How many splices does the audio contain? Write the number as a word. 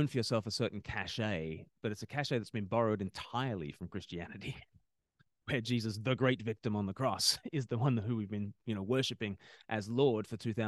one